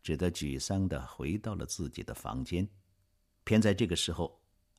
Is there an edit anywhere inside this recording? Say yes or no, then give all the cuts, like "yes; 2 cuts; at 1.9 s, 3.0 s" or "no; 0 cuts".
no; 0 cuts